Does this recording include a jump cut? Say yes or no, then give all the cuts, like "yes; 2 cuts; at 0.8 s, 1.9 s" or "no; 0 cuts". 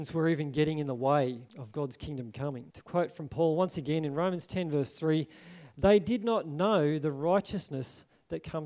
yes; 2 cuts; at 1.5 s, 2.7 s